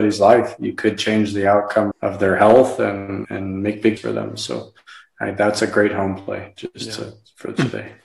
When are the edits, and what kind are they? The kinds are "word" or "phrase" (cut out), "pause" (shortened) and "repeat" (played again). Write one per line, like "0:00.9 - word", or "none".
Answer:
0:01.9 - word
0:03.2 - word
0:04.0 - word